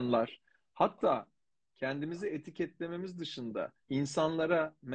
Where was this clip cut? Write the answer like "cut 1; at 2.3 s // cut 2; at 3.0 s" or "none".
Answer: cut 1; at 3.8 s

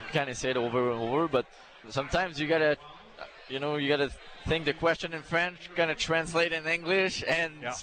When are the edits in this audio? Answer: cut 1; at 1.8 s

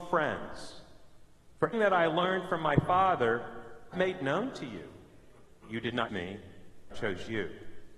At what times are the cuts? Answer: cut 1; at 1.7 s // cut 2; at 3.9 s // cut 3; at 6.1 s // cut 4; at 6.9 s

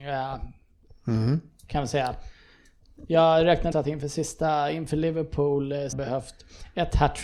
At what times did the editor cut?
cut 1; at 3.7 s // cut 2; at 5.9 s

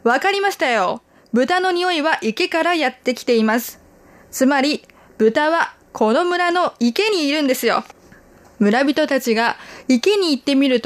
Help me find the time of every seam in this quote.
none

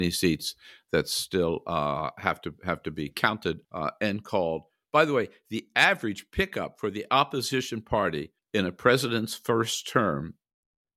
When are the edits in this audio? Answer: cut 1; at 3.6 s // cut 2; at 8.4 s

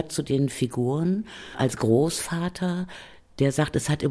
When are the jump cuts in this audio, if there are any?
none

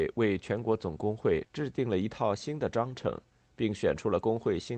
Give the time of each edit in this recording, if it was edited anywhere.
none

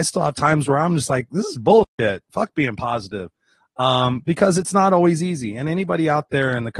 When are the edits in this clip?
none

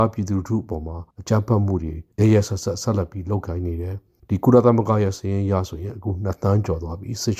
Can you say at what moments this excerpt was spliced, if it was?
cut 1; at 1.1 s // cut 2; at 2.1 s

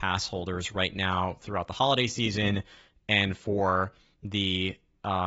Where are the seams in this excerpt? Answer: none

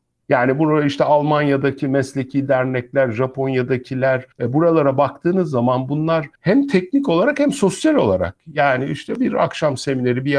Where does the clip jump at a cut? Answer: cut 1; at 4.3 s // cut 2; at 6.4 s

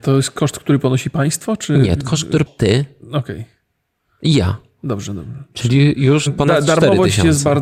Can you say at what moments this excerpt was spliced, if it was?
cut 1; at 2.0 s // cut 2; at 2.5 s // cut 3; at 6.3 s

